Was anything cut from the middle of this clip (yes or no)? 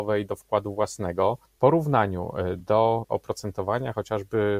no